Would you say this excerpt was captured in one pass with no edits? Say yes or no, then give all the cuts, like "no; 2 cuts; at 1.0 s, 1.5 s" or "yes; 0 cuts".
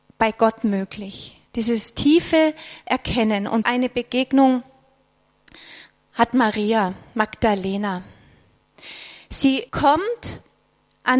no; 3 cuts; at 1.5 s, 3.6 s, 9.7 s